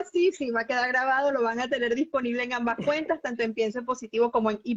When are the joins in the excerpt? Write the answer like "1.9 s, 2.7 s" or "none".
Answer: none